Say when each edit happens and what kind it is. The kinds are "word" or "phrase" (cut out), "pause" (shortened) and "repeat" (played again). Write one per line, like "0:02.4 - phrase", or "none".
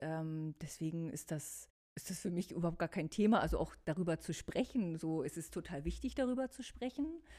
0:01.8 - pause